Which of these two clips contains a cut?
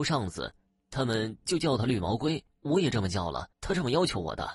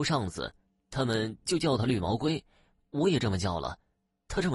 first; 2 cuts; at 2.5 s, 3.5 s

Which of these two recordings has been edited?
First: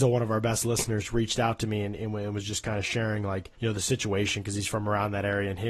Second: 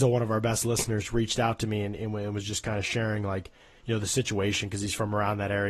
first; 1 cut; at 3.5 s

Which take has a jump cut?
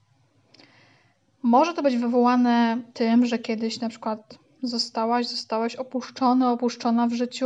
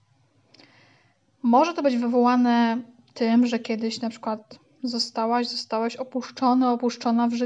first; 1 cut; at 2.9 s

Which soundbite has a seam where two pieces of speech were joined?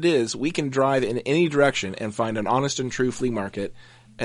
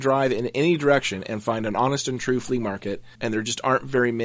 second; 1 cut; at 3.1 s

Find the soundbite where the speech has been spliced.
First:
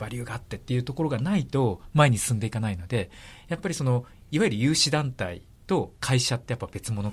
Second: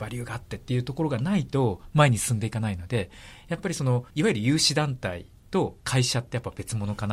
second; 1 cut; at 4.1 s

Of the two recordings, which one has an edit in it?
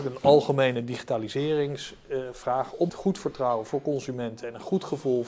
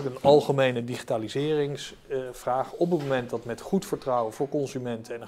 first; 1 cut; at 2.9 s

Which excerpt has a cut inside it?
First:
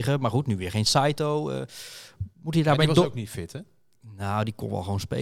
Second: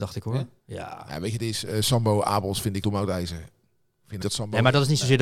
second; 2 cuts; at 2.8 s, 4.2 s

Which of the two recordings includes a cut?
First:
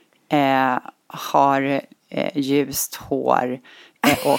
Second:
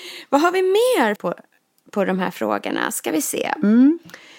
second; 1 cut; at 1.2 s

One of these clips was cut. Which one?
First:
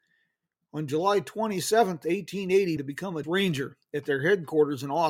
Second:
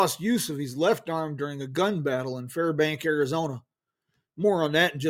first; 2 cuts; at 2.8 s, 3.2 s

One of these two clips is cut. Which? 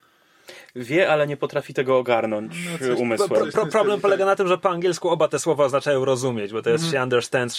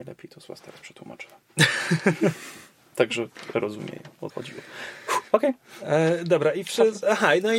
second; 3 cuts; at 3.5 s, 4.3 s, 5.3 s

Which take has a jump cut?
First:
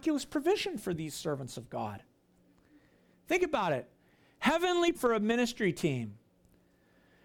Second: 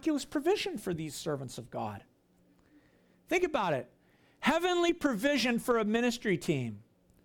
first; 1 cut; at 4.9 s

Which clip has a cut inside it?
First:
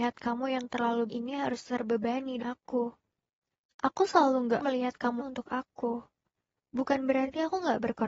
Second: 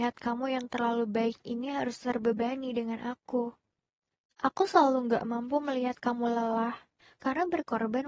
first; 4 cuts; at 1.1 s, 2.4 s, 4.6 s, 5.2 s

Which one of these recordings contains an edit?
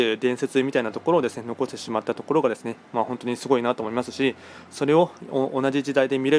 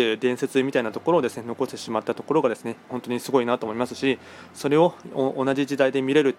second; 1 cut; at 2.9 s

